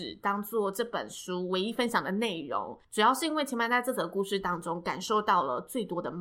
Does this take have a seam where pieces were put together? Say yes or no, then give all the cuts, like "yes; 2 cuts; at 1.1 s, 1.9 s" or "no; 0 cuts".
yes; 1 cut; at 2.8 s